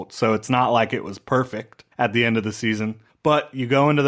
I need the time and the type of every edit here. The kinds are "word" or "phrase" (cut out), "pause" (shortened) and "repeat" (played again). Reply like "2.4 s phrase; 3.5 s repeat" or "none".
1.9 s pause; 3.1 s pause